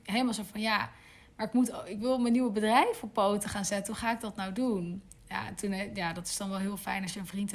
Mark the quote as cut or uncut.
uncut